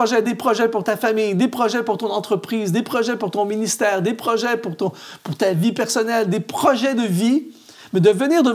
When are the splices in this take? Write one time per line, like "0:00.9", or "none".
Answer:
none